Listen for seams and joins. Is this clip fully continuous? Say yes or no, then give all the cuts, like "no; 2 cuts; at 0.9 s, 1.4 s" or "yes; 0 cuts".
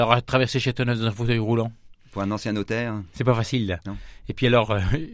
yes; 0 cuts